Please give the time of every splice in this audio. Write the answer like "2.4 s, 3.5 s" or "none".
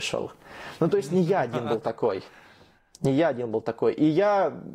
none

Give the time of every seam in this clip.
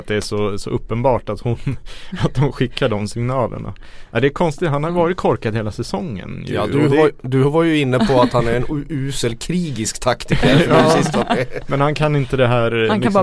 none

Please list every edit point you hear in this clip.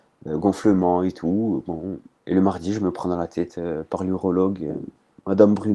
none

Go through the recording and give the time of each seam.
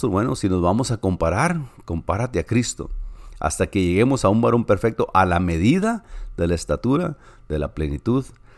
none

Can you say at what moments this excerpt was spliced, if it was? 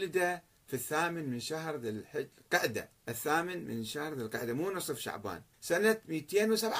3.0 s, 5.5 s

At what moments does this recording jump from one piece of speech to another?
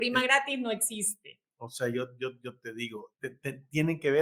3.1 s

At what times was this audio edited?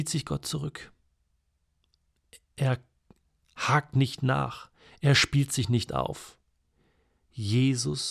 none

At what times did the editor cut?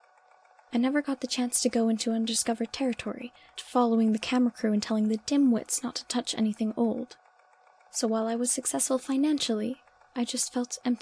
3.6 s

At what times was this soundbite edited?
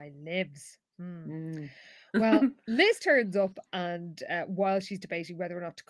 none

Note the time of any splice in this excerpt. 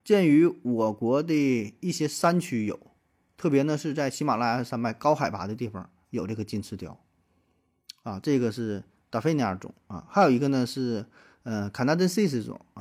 none

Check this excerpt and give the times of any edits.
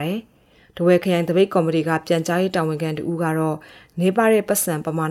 none

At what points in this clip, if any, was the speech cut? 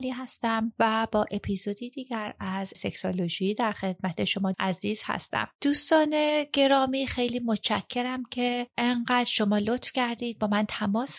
2.7 s, 4.5 s

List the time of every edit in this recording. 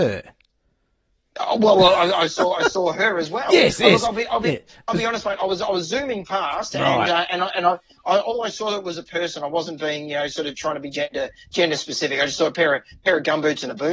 none

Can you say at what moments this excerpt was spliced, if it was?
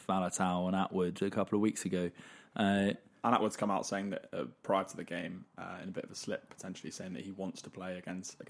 none

